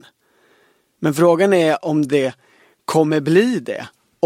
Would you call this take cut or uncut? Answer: uncut